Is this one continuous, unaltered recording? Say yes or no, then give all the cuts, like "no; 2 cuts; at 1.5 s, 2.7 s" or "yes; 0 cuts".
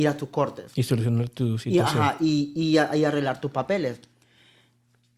yes; 0 cuts